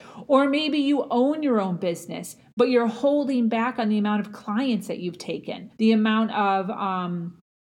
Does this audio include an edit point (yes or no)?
yes